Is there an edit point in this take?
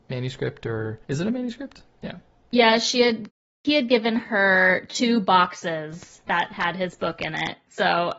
no; 0 cuts

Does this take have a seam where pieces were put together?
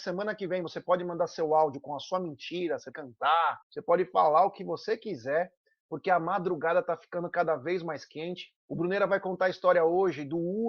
yes; 3 cuts; at 2.9 s, 3.6 s, 8.6 s

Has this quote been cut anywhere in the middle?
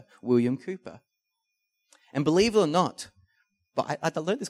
no; 0 cuts

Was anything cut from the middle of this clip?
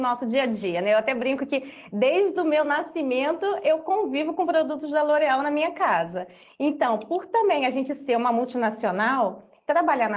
no; 0 cuts

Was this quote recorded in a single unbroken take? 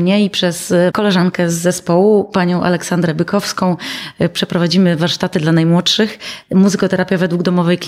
no; 1 cut; at 0.9 s

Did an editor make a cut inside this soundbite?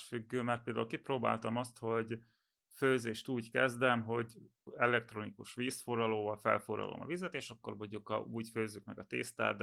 no; 0 cuts

